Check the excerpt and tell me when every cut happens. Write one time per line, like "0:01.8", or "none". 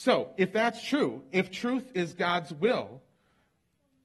none